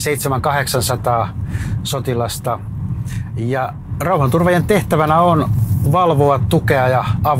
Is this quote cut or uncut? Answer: uncut